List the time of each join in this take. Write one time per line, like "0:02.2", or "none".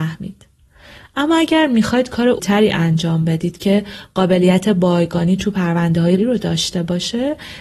0:02.4
0:06.2

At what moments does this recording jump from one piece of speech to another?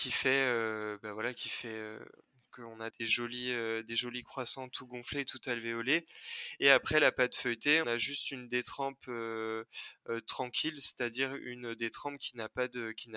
0:02.9
0:07.8

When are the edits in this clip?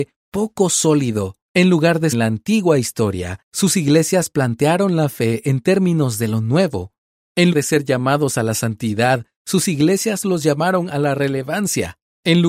0:01.4
0:02.1
0:07.5

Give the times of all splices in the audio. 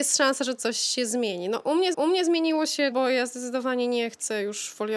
0:01.9
0:02.9

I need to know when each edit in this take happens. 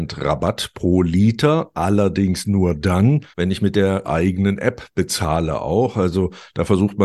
0:03.3
0:04.0

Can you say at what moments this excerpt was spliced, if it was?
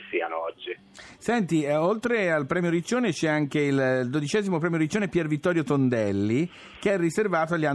none

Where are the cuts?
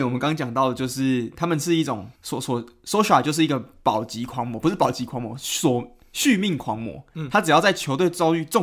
0:02.1

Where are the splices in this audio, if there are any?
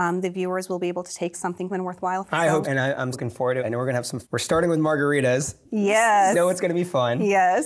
0:01.3
0:01.7
0:02.3
0:02.6
0:03.1
0:03.6
0:04.2
0:06.3

